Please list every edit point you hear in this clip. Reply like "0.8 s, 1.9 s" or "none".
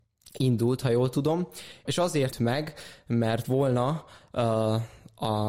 1.9 s, 2.3 s, 3.4 s